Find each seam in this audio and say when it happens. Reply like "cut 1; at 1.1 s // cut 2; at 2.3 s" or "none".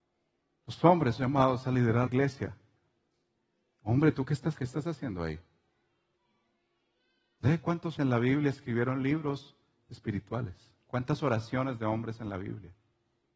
cut 1; at 1.2 s // cut 2; at 2.1 s // cut 3; at 4.6 s // cut 4; at 8.0 s